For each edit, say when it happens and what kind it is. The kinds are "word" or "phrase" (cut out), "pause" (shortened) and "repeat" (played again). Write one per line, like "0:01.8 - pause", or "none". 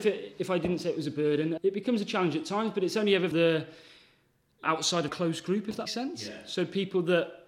0:01.6 - word
0:03.3 - word
0:04.6 - word
0:05.1 - word
0:05.9 - word